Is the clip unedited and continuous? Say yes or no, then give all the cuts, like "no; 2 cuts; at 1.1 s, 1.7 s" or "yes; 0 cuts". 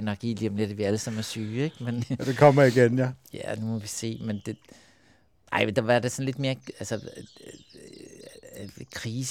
yes; 0 cuts